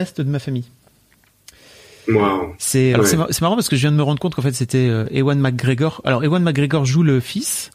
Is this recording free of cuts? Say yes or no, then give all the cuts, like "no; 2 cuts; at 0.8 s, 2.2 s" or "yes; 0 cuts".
no; 1 cut; at 2.9 s